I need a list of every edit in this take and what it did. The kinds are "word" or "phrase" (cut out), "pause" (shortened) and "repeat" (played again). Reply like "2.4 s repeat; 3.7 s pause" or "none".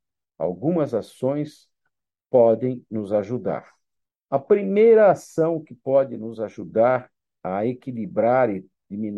none